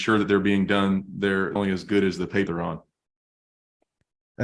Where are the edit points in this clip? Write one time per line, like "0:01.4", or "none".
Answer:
0:01.6
0:02.5